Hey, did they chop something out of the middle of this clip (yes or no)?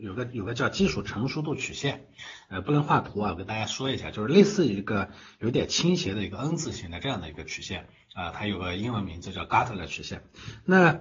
no